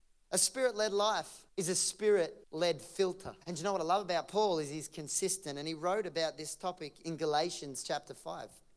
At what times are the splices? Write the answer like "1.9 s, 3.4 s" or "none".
1.5 s, 2.4 s, 3.4 s